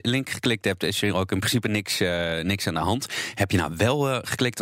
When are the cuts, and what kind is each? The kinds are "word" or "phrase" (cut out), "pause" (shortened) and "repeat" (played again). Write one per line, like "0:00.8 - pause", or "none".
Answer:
none